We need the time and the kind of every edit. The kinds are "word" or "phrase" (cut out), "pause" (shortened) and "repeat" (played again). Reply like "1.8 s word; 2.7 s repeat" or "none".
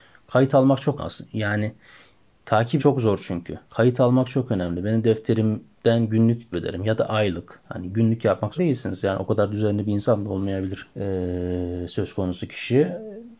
1.0 s word; 2.8 s word; 3.6 s pause; 6.5 s word; 8.6 s phrase; 10.9 s pause